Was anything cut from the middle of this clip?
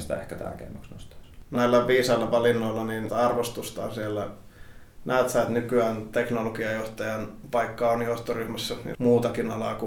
yes; 3 cuts; at 1.6 s, 3.1 s, 8.9 s

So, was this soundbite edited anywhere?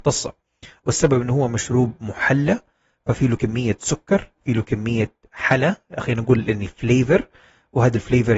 no; 0 cuts

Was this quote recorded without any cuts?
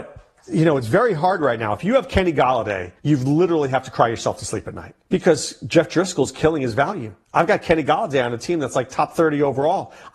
no; 3 cuts; at 3.0 s, 5.0 s, 7.2 s

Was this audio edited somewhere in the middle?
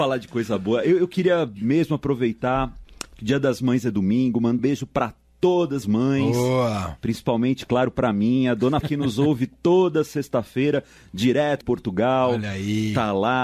yes; 4 cuts; at 4.6 s, 5.8 s, 8.8 s, 11.6 s

